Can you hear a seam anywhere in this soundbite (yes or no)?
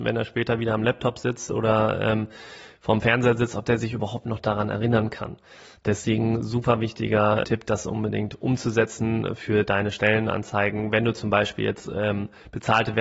yes